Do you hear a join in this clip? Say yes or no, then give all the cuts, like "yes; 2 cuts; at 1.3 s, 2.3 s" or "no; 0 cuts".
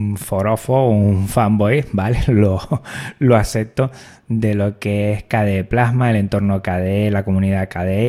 no; 0 cuts